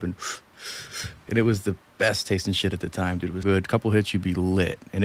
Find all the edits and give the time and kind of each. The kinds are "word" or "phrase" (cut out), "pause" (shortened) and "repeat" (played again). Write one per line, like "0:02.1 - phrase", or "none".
0:03.4 - word